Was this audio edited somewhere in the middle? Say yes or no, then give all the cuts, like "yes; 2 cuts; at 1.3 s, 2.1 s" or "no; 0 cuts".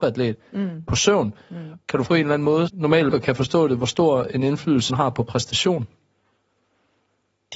yes; 4 cuts; at 2.1 s, 2.7 s, 3.1 s, 4.9 s